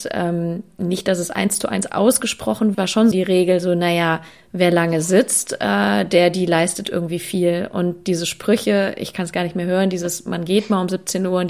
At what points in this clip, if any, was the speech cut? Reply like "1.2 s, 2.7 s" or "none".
2.7 s, 3.1 s

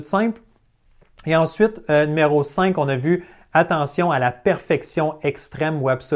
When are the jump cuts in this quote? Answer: none

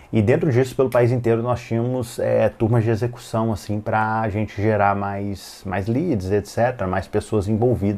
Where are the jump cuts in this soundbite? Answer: none

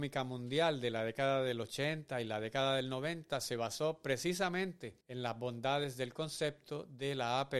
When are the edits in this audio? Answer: 5.0 s

